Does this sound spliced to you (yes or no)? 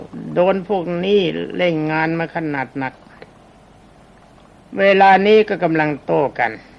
no